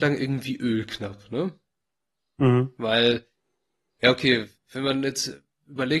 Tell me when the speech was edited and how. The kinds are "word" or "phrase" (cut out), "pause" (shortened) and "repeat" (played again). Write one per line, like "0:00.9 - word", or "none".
0:04.6 - pause